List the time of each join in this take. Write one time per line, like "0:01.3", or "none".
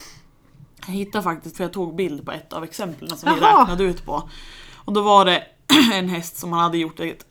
0:01.5